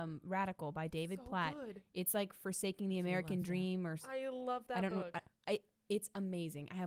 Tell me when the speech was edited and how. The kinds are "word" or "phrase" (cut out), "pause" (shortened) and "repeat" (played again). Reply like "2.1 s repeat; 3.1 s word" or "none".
none

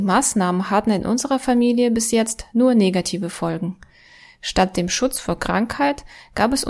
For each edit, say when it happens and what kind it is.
none

